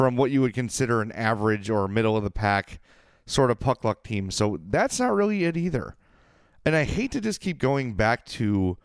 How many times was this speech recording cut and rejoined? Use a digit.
0